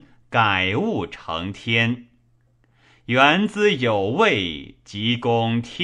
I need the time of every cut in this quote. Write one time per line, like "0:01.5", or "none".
none